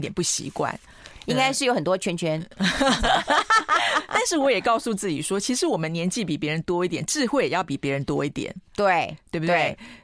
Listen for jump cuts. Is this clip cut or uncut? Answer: uncut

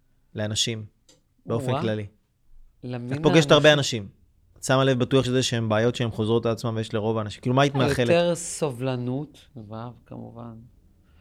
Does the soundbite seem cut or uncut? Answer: cut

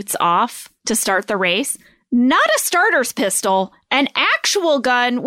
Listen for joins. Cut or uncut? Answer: uncut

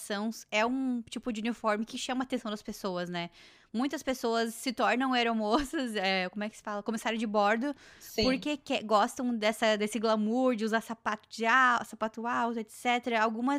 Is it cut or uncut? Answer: uncut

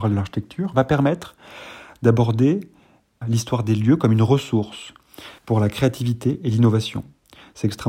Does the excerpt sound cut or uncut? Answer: cut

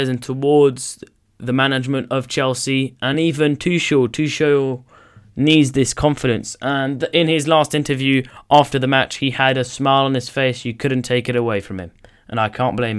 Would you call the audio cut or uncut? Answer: uncut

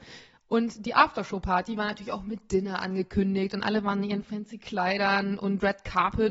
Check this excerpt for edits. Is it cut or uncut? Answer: uncut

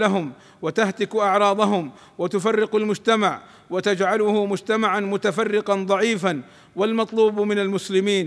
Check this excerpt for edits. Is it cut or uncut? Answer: uncut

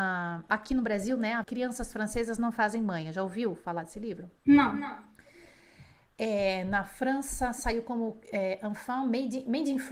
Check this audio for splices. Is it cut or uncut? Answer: cut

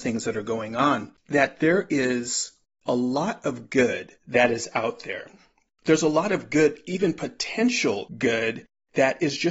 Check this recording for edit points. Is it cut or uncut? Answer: uncut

